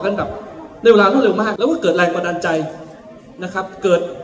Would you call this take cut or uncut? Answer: cut